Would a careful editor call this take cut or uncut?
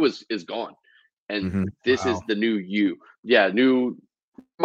uncut